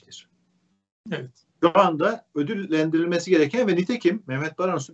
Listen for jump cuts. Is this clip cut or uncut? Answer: uncut